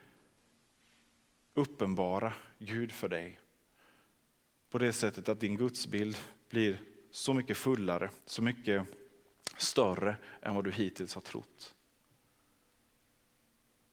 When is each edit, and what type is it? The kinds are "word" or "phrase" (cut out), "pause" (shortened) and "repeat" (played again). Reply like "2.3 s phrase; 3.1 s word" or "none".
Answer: 8.2 s pause